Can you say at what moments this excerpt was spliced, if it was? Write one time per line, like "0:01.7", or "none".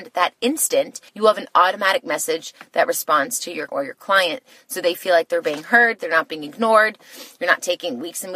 0:01.1
0:03.7